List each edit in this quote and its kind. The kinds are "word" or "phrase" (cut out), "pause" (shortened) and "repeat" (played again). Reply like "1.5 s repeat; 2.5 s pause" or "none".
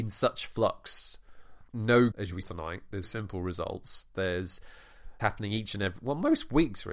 1.7 s word; 2.1 s word; 2.4 s word; 3.0 s word; 5.2 s word